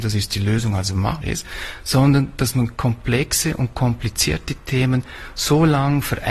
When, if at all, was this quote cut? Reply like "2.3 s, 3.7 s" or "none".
1.2 s